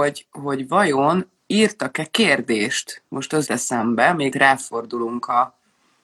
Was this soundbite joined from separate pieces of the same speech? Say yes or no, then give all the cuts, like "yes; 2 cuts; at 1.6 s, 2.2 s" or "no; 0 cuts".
yes; 3 cuts; at 1.4 s, 3.5 s, 4.3 s